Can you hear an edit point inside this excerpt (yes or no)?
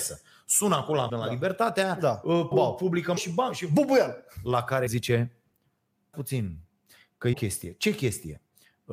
yes